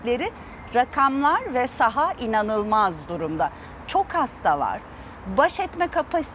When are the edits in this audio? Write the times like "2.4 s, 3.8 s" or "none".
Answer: none